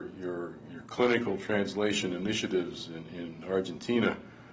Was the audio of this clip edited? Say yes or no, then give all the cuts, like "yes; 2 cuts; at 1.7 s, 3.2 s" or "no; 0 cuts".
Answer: no; 0 cuts